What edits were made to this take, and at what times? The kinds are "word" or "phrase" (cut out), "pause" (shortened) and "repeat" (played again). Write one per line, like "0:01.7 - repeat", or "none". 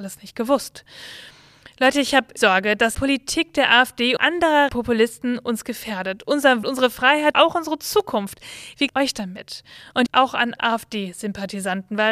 0:02.4 - word
0:02.9 - word
0:04.2 - word
0:04.7 - word
0:06.6 - word
0:07.3 - word
0:08.9 - word
0:10.1 - word
0:10.6 - word